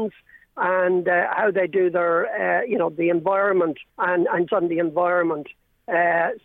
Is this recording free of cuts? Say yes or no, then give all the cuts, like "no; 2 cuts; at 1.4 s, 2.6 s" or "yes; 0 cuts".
no; 2 cuts; at 3.9 s, 4.5 s